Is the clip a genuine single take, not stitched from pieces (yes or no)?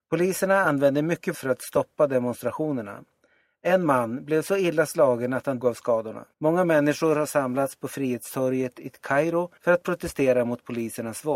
no